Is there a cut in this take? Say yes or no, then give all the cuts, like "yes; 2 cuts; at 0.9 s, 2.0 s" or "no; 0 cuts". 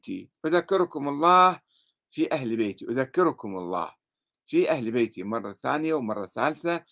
no; 0 cuts